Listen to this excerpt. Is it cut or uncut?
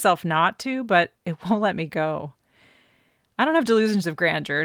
uncut